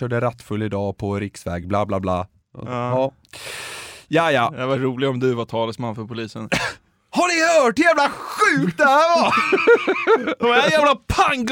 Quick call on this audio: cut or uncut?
uncut